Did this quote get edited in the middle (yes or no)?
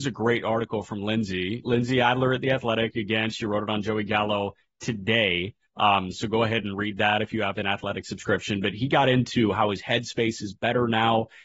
no